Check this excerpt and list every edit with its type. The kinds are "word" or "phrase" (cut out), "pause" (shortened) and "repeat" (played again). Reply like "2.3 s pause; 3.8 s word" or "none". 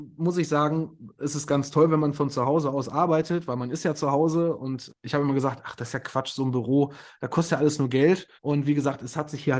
4.9 s word; 8.4 s pause